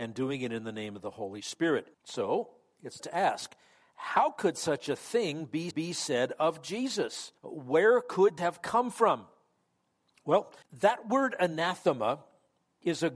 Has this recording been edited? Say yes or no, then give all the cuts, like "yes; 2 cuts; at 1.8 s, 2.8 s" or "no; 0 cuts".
yes; 6 cuts; at 1.9 s, 3.0 s, 5.7 s, 7.4 s, 8.4 s, 10.6 s